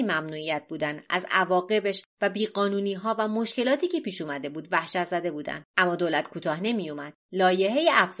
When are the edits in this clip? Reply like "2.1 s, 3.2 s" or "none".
5.7 s, 7.2 s